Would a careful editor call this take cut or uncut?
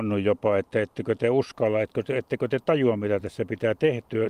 uncut